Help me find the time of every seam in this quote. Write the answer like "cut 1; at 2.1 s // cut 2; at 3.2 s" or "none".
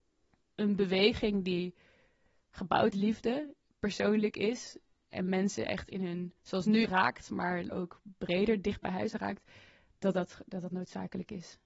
cut 1; at 2.9 s // cut 2; at 6.4 s // cut 3; at 6.8 s // cut 4; at 7.7 s